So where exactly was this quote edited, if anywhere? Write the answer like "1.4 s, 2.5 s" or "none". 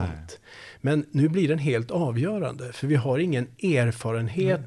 none